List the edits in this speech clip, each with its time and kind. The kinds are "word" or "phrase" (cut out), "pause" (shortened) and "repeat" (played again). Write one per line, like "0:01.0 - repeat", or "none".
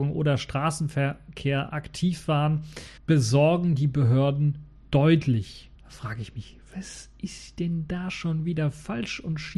0:03.0 - pause
0:05.8 - pause